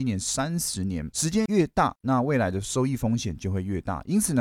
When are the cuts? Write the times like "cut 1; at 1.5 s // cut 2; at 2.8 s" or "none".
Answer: none